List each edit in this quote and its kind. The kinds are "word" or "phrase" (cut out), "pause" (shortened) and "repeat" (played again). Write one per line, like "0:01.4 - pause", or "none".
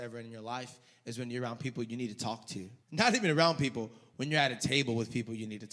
0:02.8 - pause